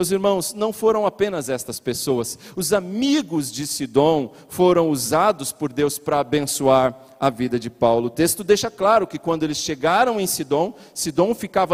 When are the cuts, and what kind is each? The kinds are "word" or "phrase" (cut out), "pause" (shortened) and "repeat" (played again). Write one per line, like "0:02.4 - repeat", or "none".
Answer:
none